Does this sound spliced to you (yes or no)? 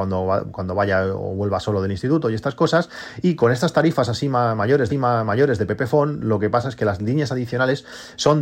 yes